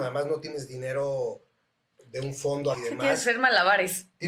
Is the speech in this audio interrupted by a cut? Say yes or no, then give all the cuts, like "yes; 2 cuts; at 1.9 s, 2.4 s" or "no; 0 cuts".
yes; 1 cut; at 2.7 s